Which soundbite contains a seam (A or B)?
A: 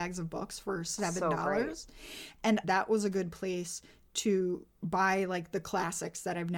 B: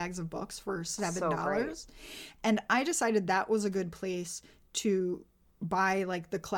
A